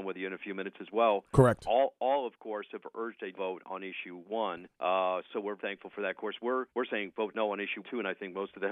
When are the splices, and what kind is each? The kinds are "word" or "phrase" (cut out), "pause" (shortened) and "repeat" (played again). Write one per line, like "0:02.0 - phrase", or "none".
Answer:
0:03.3 - word
0:04.7 - pause
0:05.6 - word
0:06.7 - pause
0:07.8 - phrase